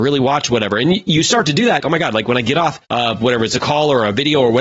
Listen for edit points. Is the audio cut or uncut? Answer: cut